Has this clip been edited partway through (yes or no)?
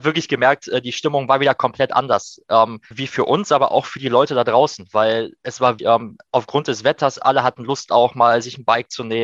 yes